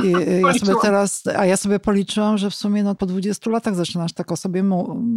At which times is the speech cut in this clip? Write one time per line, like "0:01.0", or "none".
0:03.0